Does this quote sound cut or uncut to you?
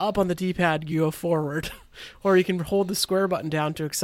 uncut